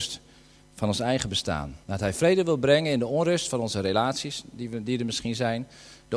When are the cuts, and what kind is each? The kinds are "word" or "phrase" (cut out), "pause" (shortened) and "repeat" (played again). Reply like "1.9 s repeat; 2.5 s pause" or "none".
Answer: 1.8 s pause